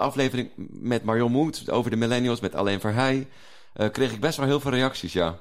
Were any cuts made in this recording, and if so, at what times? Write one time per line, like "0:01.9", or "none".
none